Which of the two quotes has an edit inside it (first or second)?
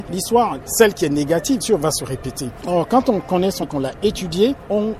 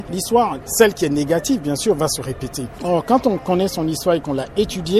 first